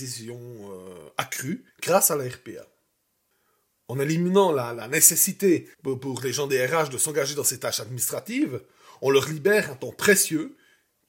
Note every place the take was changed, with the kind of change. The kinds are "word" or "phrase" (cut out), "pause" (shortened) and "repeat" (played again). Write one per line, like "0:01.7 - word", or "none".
0:01.7 - pause
0:05.7 - pause